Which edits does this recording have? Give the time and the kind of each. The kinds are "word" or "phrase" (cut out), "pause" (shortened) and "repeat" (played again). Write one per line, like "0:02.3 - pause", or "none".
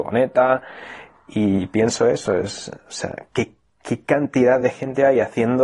none